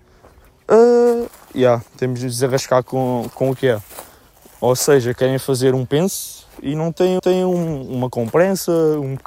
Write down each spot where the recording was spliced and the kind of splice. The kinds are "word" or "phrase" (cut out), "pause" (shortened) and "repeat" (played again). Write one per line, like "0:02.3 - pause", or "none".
0:01.9 - pause
0:07.2 - repeat